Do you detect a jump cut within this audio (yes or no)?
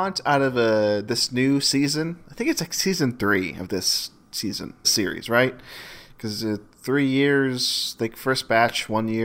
yes